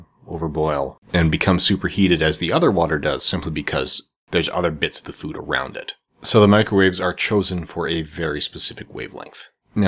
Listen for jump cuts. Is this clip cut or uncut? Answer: cut